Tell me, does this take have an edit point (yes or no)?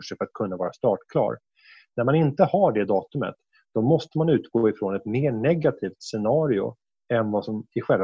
no